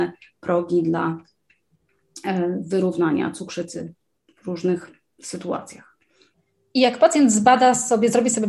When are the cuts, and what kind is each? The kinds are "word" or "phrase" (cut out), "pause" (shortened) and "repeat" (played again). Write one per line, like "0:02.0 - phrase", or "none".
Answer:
none